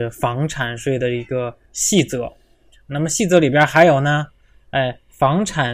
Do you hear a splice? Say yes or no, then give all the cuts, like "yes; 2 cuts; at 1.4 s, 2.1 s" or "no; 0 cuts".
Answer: yes; 1 cut; at 1.6 s